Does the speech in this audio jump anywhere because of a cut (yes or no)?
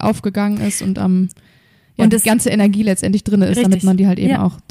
no